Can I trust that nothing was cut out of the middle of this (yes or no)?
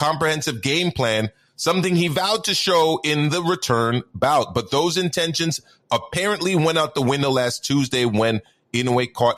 yes